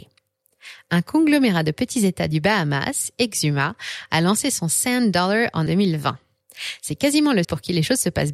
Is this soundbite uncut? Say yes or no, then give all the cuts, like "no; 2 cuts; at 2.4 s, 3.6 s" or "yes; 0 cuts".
no; 2 cuts; at 5.7 s, 7.4 s